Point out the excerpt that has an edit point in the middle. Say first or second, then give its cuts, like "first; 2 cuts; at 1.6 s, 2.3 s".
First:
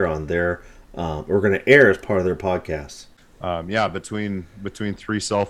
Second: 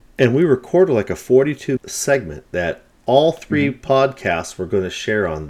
second; 1 cut; at 1.8 s